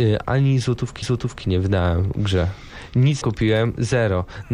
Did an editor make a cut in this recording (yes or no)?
yes